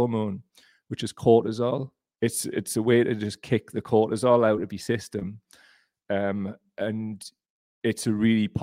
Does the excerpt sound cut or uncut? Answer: uncut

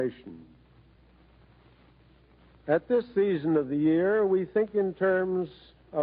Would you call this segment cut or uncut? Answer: uncut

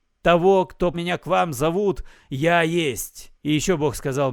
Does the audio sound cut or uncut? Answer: cut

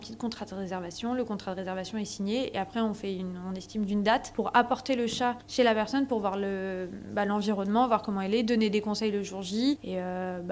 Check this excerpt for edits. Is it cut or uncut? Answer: uncut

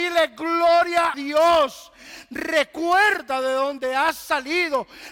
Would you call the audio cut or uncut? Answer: cut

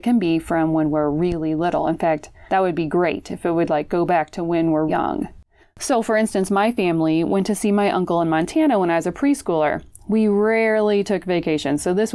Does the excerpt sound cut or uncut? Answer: cut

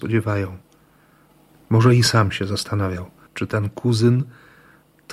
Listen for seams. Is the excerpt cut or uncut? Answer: cut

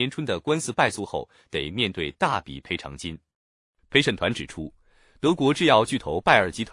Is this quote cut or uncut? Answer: uncut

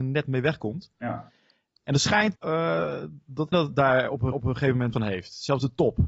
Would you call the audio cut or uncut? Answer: cut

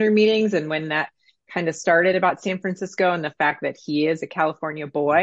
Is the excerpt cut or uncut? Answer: uncut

